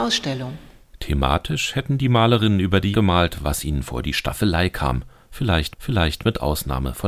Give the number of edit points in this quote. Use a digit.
2